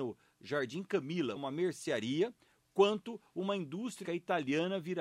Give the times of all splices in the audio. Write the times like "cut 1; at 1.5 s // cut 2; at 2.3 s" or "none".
cut 1; at 1.4 s // cut 2; at 4.0 s